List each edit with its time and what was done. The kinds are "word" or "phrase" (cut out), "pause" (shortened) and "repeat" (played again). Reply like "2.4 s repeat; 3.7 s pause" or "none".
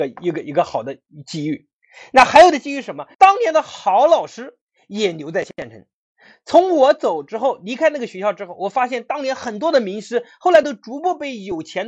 3.1 s pause